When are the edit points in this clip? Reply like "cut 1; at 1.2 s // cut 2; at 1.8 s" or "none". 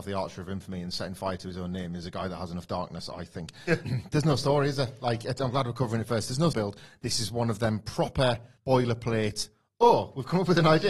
cut 1; at 3.8 s // cut 2; at 6.5 s // cut 3; at 8.6 s